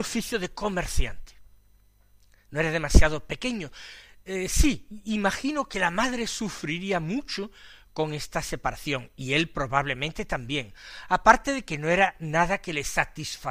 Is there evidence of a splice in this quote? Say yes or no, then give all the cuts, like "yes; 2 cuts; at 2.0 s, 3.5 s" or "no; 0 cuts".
no; 0 cuts